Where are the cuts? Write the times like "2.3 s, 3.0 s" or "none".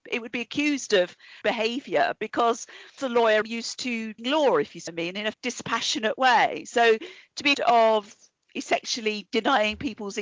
1.4 s, 3.0 s, 3.4 s, 4.2 s, 4.9 s, 5.3 s, 7.5 s